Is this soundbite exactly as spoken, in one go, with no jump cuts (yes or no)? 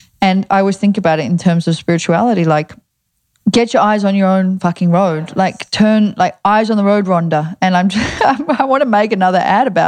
yes